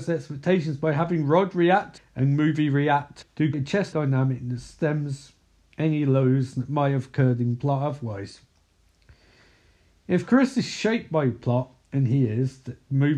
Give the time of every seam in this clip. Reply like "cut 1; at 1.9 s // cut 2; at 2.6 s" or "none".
cut 1; at 2.0 s // cut 2; at 3.2 s // cut 3; at 3.5 s // cut 4; at 3.9 s